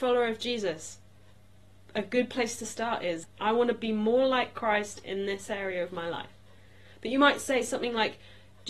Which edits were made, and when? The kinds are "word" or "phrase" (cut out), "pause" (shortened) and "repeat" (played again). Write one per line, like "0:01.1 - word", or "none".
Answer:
none